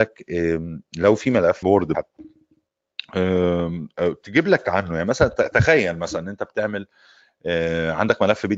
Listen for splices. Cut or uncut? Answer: cut